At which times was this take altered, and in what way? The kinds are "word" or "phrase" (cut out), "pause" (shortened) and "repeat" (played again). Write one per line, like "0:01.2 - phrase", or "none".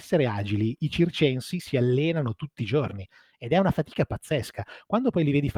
none